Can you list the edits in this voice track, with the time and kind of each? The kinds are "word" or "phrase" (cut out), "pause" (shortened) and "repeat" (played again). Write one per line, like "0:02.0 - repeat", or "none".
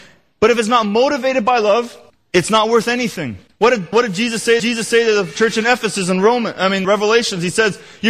0:02.1 - pause
0:03.5 - pause
0:03.9 - word
0:04.6 - repeat
0:06.8 - word

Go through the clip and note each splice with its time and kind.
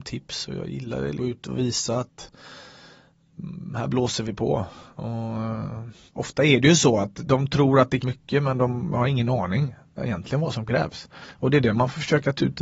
0:01.2 - word
0:06.1 - pause
0:08.0 - word

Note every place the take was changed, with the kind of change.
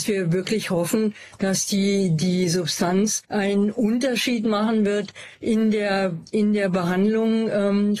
0:03.2 - pause

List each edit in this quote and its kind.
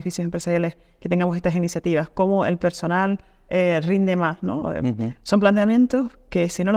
none

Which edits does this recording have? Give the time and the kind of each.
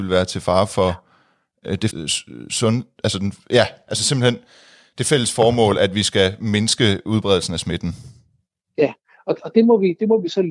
0:01.9 - word

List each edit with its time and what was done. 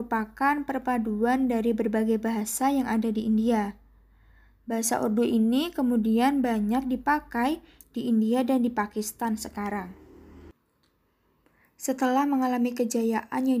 none

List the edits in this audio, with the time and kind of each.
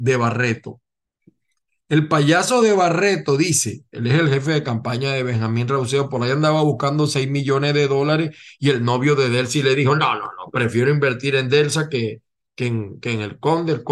none

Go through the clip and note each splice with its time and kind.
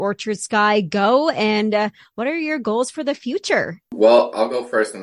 none

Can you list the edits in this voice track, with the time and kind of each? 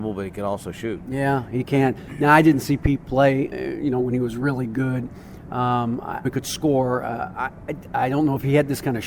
0:03.5 - word
0:06.2 - word

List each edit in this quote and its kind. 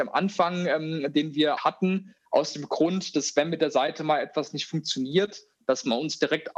0:01.6 - word

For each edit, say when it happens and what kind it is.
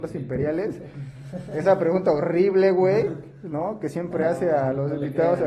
none

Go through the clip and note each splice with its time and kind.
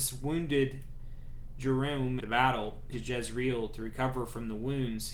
0:02.2 - word
0:02.9 - word

